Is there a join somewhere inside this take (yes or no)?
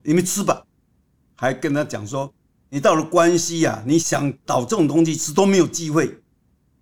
no